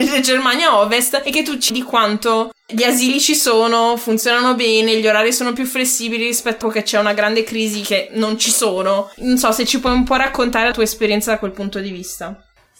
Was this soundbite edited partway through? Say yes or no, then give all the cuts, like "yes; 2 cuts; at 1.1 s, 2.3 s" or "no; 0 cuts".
yes; 4 cuts; at 1.7 s, 6.6 s, 9.2 s, 10.7 s